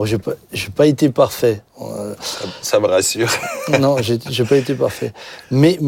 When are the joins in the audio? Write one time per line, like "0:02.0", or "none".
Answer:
0:01.7

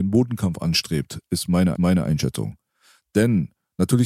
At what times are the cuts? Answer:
0:01.8

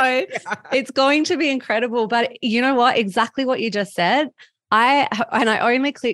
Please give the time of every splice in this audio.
none

